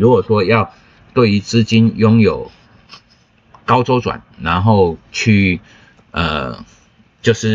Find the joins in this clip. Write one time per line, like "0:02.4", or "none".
none